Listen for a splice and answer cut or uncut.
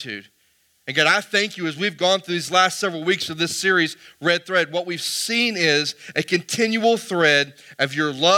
uncut